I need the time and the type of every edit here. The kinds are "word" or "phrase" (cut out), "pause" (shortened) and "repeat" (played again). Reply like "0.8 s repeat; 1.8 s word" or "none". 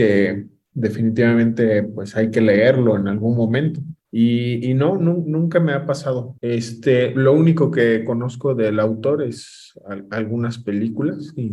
4.0 s pause; 6.4 s pause